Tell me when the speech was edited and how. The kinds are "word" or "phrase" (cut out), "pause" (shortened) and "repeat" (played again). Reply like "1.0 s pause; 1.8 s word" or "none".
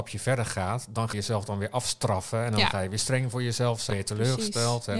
1.1 s word; 3.9 s word